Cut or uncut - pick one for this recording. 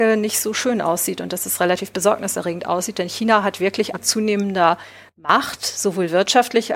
cut